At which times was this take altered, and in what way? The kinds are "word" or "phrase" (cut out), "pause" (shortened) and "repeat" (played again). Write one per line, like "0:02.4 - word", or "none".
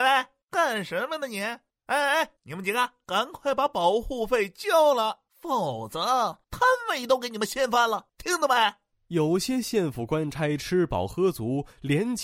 0:05.3 - pause